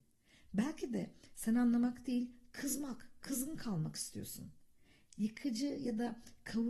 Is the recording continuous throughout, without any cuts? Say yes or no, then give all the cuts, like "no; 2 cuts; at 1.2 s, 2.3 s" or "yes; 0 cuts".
yes; 0 cuts